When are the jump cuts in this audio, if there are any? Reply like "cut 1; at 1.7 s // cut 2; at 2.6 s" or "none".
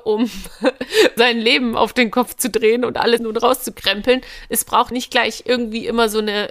cut 1; at 1.2 s // cut 2; at 3.2 s // cut 3; at 4.9 s